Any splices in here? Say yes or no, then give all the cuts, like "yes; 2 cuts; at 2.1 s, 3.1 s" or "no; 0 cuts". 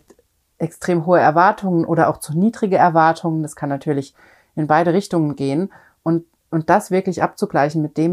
no; 0 cuts